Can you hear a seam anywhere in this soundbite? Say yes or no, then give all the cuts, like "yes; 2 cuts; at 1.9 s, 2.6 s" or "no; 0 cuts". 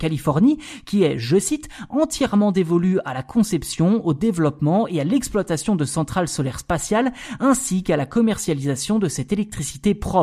no; 0 cuts